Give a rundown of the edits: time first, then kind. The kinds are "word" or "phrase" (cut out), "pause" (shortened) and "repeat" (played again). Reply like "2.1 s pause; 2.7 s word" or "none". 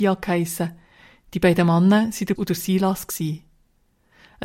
2.4 s word